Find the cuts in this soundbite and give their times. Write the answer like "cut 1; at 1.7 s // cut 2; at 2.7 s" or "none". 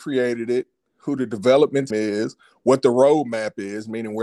cut 1; at 1.9 s